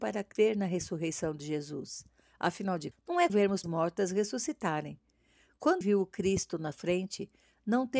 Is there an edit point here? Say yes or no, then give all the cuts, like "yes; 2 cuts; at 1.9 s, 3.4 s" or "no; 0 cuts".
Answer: yes; 5 cuts; at 2.9 s, 3.3 s, 3.6 s, 5.8 s, 6.7 s